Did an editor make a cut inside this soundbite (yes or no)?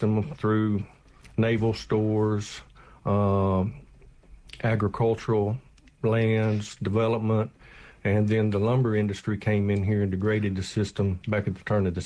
no